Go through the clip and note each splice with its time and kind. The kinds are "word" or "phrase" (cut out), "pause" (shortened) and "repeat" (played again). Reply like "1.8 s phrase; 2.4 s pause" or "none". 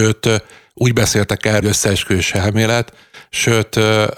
1.6 s phrase